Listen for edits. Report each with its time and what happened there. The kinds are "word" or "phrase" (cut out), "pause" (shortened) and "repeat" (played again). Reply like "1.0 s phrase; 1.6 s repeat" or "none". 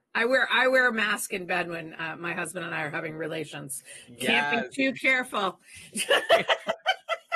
none

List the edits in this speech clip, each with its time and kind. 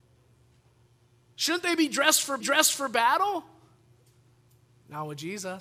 2.4 s repeat

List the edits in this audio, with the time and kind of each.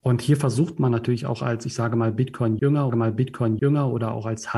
2.9 s repeat

